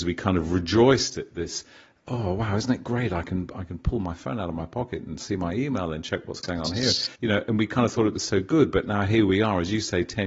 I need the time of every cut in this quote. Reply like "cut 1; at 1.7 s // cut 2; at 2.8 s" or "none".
cut 1; at 7.1 s